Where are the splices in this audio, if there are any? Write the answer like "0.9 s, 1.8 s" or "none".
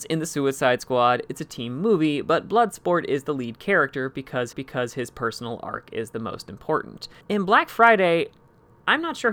4.5 s, 7.2 s